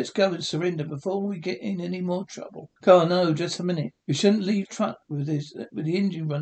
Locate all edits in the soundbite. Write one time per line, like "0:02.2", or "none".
0:02.8
0:04.0
0:04.6